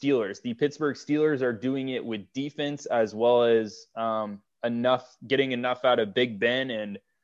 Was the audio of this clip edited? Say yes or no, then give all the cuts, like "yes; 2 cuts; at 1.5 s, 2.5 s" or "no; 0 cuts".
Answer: no; 0 cuts